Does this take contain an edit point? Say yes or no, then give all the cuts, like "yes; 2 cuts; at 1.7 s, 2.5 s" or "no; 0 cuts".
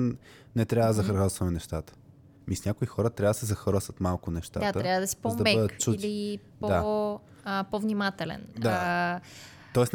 no; 0 cuts